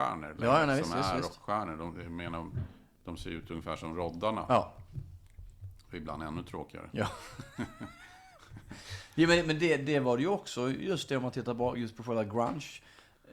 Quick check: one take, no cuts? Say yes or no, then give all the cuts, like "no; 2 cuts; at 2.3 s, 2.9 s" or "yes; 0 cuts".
yes; 0 cuts